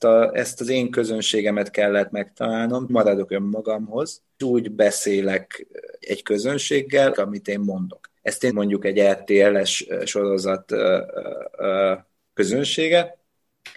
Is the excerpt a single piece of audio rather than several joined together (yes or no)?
no